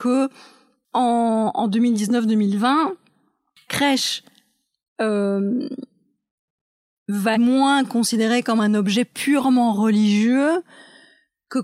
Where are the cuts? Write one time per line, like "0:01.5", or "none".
0:03.7
0:07.3